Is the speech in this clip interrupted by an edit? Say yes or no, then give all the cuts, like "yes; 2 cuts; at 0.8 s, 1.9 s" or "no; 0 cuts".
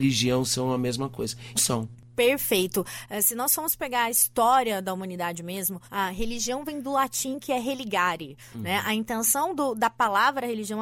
yes; 2 cuts; at 1.6 s, 5.9 s